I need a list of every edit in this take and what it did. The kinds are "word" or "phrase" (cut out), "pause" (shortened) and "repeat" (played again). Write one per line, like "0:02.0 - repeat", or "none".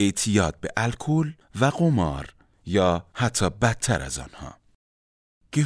none